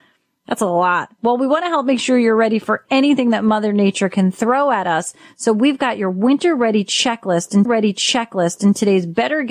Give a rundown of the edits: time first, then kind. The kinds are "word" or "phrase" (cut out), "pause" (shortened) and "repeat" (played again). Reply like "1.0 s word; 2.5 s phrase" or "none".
7.6 s repeat